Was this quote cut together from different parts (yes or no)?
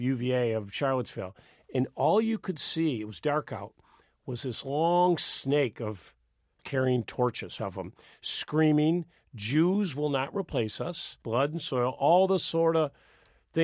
yes